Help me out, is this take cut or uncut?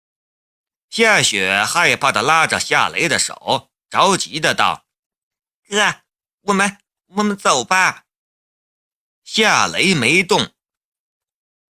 cut